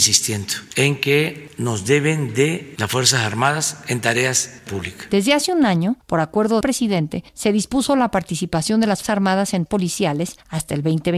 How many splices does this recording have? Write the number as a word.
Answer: five